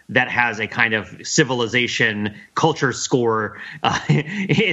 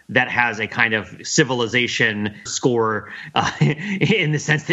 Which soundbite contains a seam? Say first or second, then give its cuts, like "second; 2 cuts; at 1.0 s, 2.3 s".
second; 1 cut; at 2.5 s